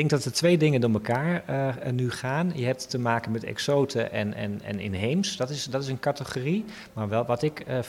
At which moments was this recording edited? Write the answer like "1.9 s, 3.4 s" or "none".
none